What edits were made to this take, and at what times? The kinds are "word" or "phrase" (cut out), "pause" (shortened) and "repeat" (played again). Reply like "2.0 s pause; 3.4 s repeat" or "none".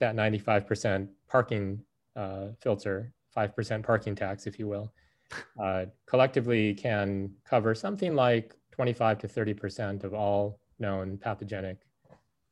none